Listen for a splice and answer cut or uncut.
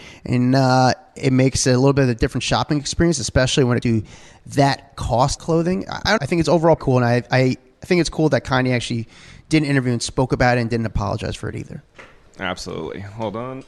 cut